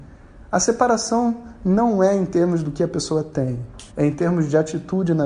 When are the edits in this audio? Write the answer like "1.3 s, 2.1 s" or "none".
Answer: 3.9 s